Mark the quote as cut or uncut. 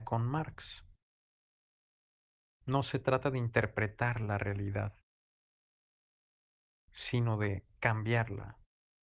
uncut